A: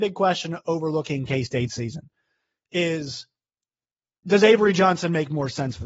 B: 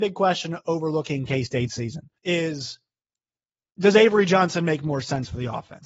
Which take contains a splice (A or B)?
B